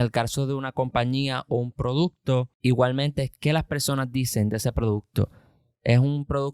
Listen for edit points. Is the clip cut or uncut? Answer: cut